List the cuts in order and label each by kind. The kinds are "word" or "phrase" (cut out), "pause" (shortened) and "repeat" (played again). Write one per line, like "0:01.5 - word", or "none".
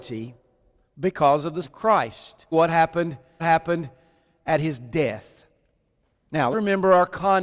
0:01.6 - word
0:02.5 - word
0:03.4 - repeat
0:06.5 - word

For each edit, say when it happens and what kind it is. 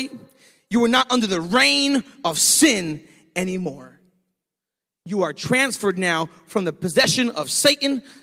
none

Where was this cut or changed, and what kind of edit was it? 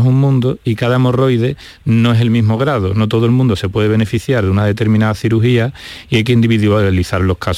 none

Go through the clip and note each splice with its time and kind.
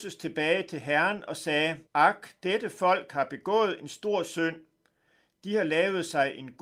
0:01.9 - pause

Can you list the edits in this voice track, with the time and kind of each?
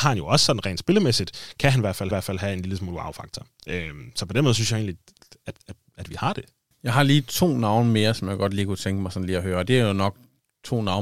0:02.1 - repeat
0:05.6 - pause
0:06.7 - pause

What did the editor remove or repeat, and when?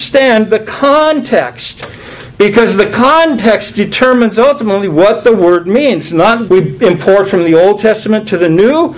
0:06.5 - word

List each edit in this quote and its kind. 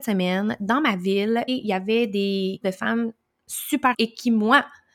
0:01.5 - word
0:02.6 - word
0:03.9 - word

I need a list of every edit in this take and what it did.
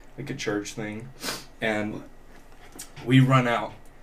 0:01.5 - pause

